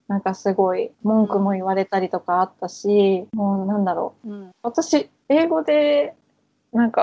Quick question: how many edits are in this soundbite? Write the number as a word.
three